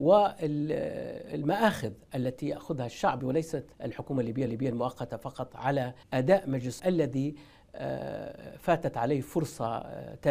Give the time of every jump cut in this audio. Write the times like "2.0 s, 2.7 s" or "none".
3.2 s, 3.7 s, 4.5 s, 6.0 s, 6.8 s